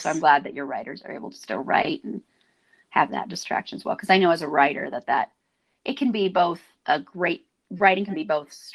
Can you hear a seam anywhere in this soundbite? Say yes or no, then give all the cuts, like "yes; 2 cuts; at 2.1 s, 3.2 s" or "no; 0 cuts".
no; 0 cuts